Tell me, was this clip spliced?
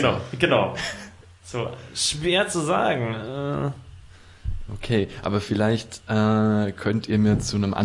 no; 0 cuts

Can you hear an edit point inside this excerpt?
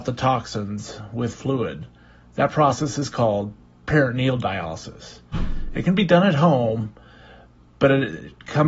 no; 0 cuts

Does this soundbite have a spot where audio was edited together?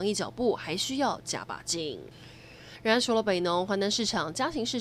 no; 0 cuts

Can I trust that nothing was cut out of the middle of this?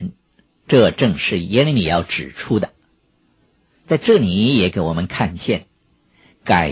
yes; 0 cuts

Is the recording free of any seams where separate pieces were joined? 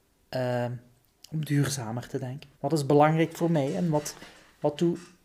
no; 1 cut; at 2.5 s

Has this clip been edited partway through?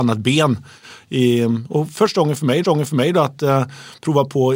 yes; 1 cut; at 2.6 s

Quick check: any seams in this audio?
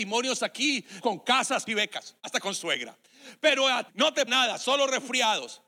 yes; 5 cuts; at 1.0 s, 1.7 s, 2.2 s, 3.9 s, 4.3 s

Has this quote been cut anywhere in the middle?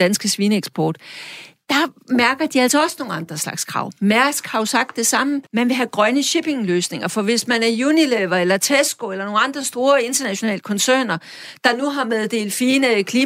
yes; 1 cut; at 5.5 s

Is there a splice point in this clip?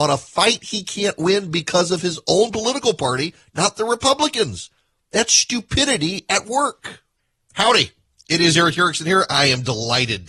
no; 0 cuts

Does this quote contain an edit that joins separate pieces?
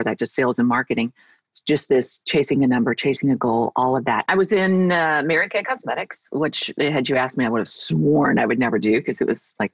no; 0 cuts

